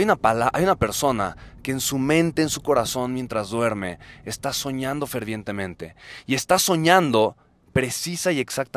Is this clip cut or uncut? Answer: uncut